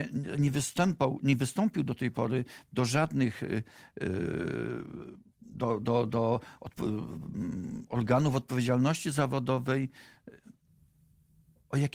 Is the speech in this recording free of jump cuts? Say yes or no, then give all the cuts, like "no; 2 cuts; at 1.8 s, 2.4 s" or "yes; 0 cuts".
yes; 0 cuts